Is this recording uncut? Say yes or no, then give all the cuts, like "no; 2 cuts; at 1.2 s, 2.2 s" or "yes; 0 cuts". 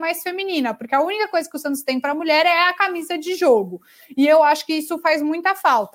yes; 0 cuts